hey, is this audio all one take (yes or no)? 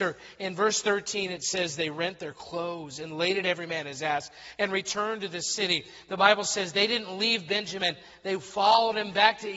yes